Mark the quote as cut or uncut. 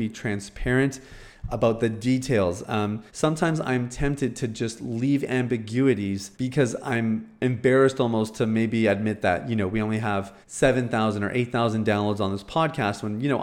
cut